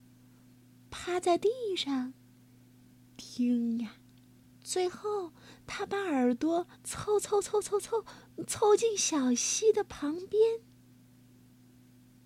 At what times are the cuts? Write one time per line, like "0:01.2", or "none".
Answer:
0:04.4
0:06.7